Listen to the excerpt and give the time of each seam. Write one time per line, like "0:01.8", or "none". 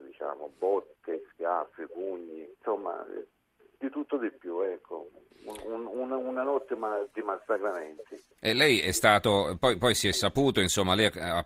0:02.5
0:05.3
0:08.3